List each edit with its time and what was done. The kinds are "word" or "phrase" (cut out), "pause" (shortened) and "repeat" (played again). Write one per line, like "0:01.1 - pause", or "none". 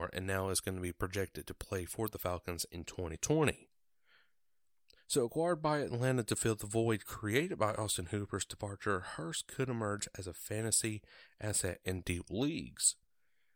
none